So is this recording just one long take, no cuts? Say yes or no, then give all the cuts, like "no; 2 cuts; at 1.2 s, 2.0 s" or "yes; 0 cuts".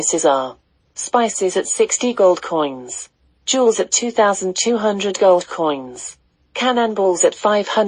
yes; 0 cuts